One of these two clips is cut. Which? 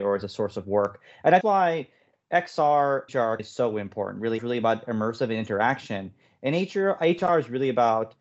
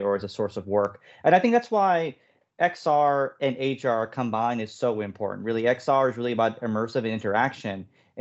first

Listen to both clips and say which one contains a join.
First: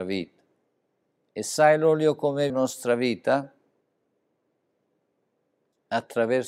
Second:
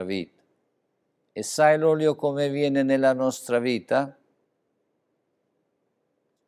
first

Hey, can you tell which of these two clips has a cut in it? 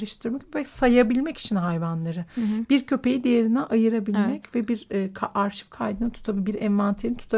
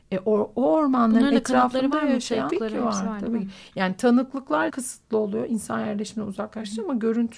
second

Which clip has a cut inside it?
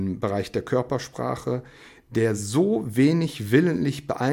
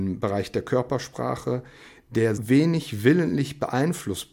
second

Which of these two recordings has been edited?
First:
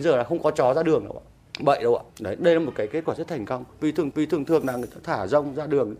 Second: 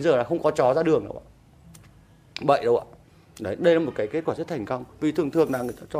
first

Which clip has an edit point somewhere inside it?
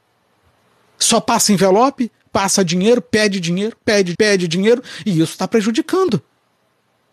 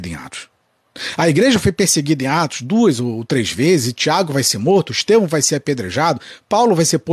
first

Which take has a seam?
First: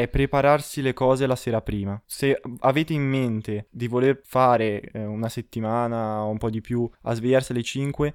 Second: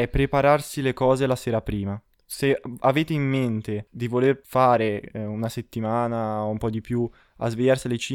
first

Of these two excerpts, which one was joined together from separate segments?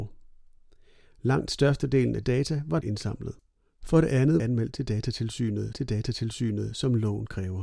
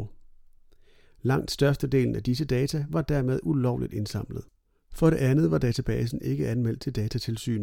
first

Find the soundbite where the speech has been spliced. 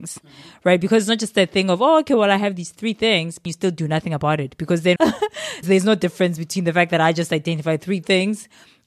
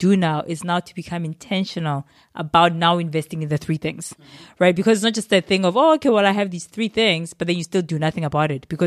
first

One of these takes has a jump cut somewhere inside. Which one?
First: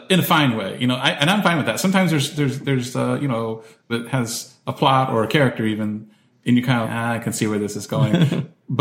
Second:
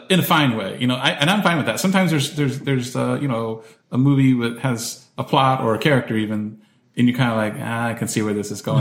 first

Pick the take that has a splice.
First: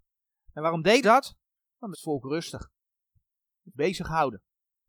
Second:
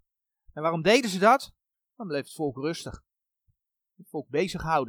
first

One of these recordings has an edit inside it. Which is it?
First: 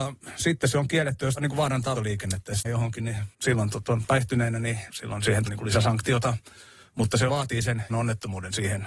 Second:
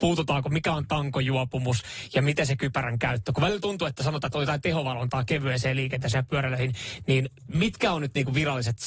first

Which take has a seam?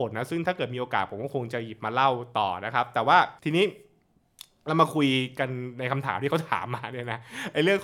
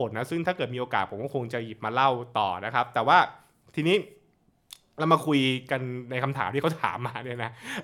first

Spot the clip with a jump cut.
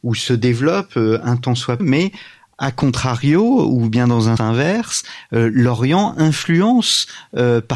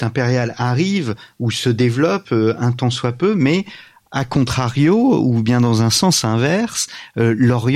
first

